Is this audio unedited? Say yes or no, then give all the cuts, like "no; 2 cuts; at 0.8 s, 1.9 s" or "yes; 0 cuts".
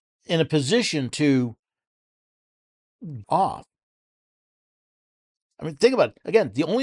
no; 1 cut; at 3.2 s